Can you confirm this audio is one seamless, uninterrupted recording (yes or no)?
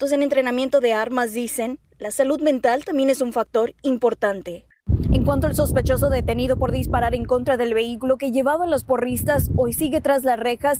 yes